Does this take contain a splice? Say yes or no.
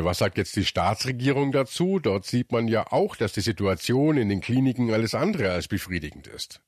no